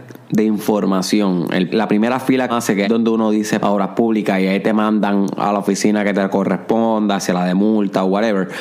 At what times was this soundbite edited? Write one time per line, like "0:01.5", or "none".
0:01.7
0:02.5
0:02.8
0:03.6